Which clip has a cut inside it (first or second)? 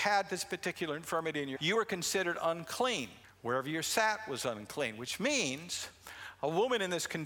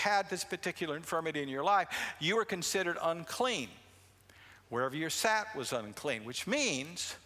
first